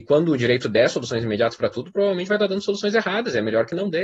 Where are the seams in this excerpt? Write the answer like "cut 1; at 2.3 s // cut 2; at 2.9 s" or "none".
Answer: none